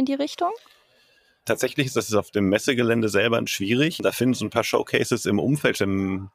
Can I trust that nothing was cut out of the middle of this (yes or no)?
no